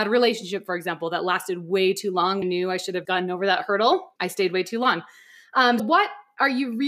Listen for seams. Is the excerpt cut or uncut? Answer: cut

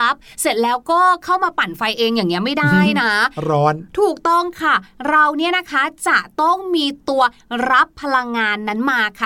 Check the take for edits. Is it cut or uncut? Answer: uncut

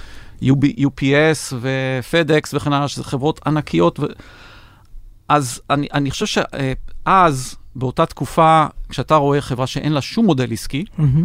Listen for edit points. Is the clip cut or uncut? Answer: uncut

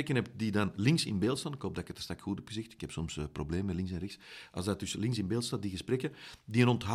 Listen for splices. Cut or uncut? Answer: uncut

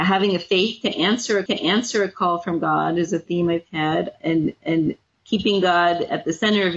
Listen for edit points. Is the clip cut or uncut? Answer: cut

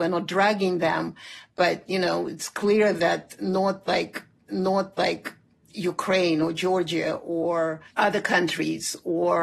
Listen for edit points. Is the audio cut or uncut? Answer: cut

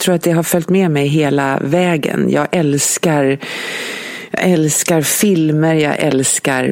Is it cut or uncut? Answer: uncut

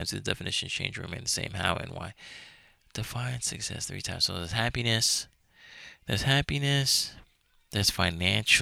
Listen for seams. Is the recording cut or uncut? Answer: uncut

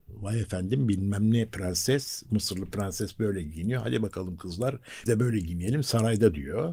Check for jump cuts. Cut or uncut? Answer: cut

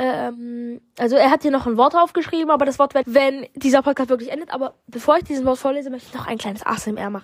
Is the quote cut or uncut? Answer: cut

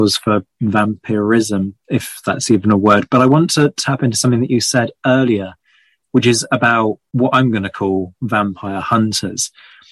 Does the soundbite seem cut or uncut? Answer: uncut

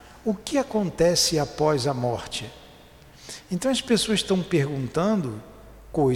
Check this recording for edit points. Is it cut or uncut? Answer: uncut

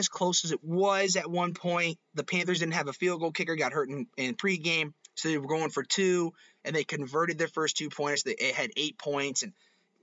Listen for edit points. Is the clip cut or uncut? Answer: uncut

